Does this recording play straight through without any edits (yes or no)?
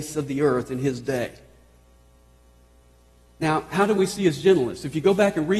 yes